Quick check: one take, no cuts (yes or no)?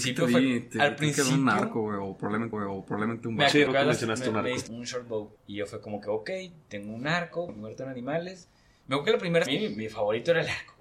no